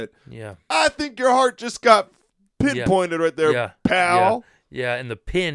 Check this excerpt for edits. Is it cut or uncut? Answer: uncut